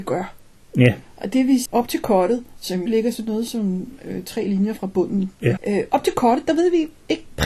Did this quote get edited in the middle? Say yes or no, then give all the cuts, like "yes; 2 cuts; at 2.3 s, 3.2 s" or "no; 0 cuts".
yes; 3 cuts; at 1.7 s, 2.9 s, 5.6 s